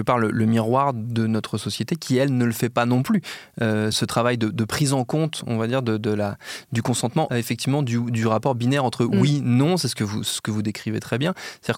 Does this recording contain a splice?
yes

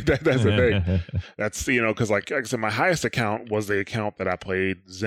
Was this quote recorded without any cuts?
yes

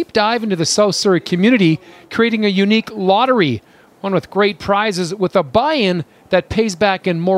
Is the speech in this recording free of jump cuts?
yes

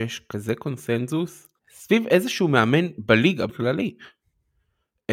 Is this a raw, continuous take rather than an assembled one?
no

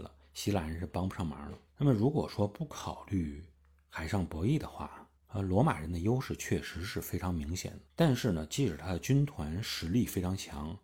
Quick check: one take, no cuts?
no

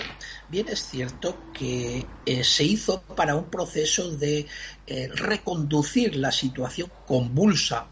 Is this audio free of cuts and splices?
yes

